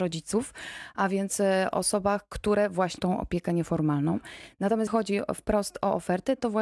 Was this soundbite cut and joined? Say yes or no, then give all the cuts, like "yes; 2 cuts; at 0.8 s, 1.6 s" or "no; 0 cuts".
yes; 2 cuts; at 3.0 s, 4.9 s